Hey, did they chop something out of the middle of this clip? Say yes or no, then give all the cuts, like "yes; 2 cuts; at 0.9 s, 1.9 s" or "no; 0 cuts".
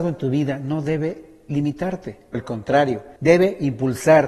yes; 2 cuts; at 2.3 s, 3.2 s